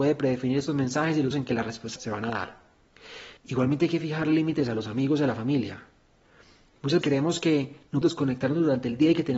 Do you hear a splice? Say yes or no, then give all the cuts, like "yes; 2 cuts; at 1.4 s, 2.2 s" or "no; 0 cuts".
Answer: yes; 5 cuts; at 1.3 s, 2.0 s, 3.4 s, 7.0 s, 8.0 s